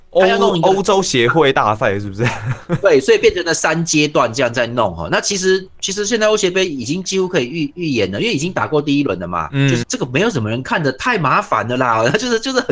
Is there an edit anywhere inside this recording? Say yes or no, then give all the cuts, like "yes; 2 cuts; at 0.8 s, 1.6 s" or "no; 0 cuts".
yes; 1 cut; at 9.8 s